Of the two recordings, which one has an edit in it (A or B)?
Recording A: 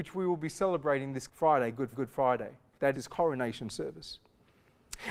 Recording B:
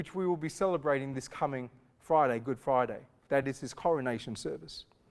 A